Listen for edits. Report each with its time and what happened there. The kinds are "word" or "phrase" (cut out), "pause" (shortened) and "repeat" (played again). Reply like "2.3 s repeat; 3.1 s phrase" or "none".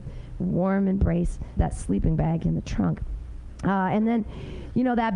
1.6 s word